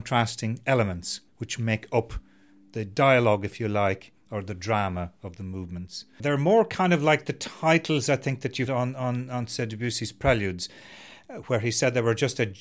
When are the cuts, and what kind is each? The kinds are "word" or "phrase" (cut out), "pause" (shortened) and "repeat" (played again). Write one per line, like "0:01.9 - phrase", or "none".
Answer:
0:01.3 - pause
0:08.7 - word